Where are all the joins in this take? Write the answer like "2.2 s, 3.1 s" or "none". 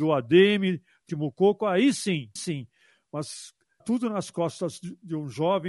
1.1 s, 2.4 s, 3.8 s